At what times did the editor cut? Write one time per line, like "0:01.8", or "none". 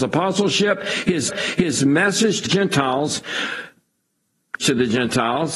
0:01.3
0:02.4
0:04.6